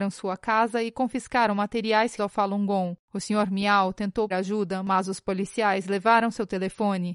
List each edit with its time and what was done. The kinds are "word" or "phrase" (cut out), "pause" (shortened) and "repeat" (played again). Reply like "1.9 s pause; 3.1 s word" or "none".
2.2 s word; 3.0 s pause; 4.3 s word